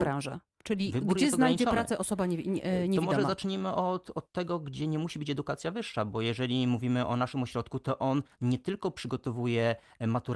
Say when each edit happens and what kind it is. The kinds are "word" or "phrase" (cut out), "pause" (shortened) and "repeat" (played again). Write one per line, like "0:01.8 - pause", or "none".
none